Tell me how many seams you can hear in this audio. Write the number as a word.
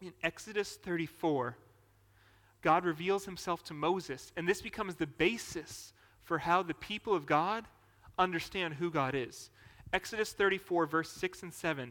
zero